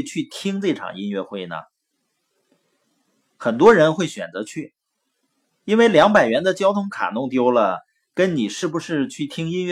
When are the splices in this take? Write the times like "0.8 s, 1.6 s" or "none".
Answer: none